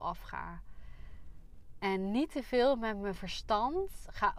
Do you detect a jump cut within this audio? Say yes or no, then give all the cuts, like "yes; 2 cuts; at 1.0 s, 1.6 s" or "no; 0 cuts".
no; 0 cuts